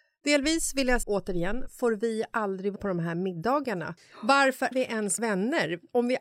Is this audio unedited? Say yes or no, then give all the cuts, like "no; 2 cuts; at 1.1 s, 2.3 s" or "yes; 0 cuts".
no; 5 cuts; at 1.0 s, 1.7 s, 2.8 s, 4.7 s, 5.2 s